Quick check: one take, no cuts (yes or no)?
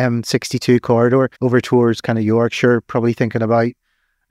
no